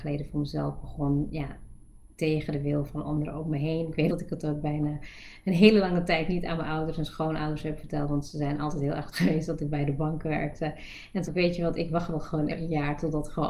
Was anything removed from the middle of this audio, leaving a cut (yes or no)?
yes